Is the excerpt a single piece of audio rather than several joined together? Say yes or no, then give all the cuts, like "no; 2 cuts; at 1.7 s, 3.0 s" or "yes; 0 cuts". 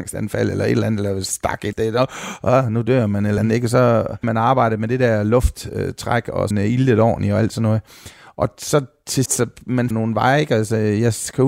no; 6 cuts; at 1.7 s, 3.4 s, 4.2 s, 6.5 s, 9.3 s, 9.9 s